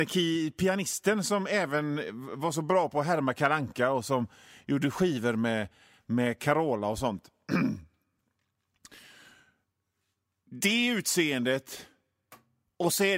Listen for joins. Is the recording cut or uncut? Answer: uncut